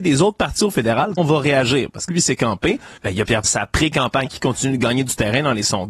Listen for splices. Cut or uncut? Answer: cut